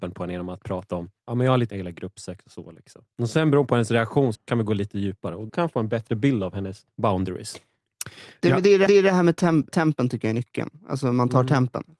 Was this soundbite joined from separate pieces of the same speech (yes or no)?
yes